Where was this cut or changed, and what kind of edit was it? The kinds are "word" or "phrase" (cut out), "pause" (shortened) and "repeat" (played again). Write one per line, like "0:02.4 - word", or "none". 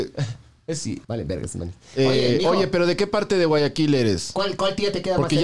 0:01.0 - pause